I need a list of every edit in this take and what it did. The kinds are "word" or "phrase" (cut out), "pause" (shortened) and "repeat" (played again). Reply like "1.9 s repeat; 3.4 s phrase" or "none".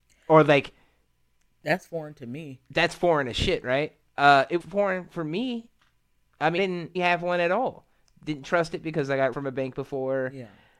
4.6 s word; 6.6 s word; 6.9 s word; 9.3 s word